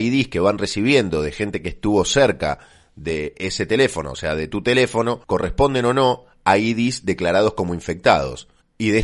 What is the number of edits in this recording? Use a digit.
0